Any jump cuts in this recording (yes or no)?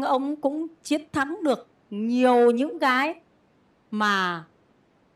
no